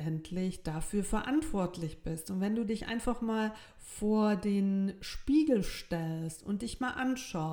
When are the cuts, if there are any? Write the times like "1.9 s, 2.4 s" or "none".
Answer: none